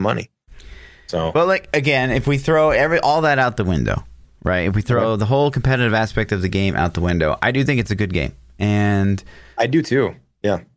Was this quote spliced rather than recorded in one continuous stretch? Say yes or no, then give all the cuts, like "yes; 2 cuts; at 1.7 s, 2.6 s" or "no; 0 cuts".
no; 0 cuts